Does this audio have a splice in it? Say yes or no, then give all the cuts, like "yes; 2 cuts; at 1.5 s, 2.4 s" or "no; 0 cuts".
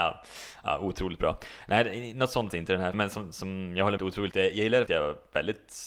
yes; 5 cuts; at 2.5 s, 2.9 s, 4.0 s, 4.3 s, 4.9 s